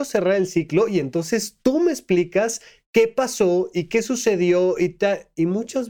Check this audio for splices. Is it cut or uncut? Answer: uncut